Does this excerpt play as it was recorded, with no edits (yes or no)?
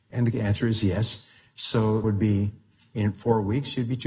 no